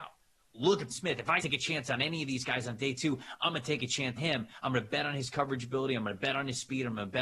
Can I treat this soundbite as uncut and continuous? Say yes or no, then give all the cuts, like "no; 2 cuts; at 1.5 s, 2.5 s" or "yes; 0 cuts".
no; 3 cuts; at 0.9 s, 1.4 s, 4.2 s